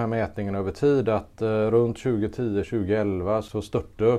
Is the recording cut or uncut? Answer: uncut